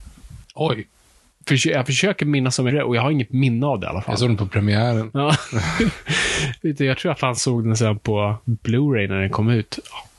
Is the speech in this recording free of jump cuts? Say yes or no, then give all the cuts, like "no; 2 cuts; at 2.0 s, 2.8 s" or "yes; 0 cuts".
no; 1 cut; at 2.7 s